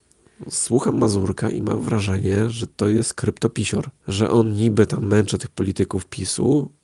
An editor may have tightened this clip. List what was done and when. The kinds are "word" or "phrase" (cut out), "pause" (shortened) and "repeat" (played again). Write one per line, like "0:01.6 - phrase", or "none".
0:04.0 - pause